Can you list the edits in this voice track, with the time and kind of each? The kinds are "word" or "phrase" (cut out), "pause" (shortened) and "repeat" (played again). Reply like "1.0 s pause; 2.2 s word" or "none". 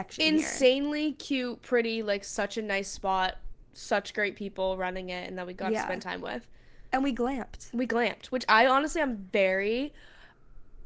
3.7 s pause